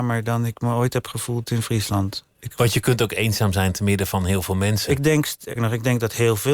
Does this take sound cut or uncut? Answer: cut